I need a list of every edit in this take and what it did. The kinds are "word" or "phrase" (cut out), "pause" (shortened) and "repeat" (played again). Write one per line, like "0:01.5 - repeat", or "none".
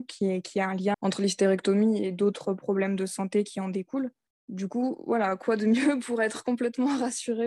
0:00.9 - word
0:04.3 - pause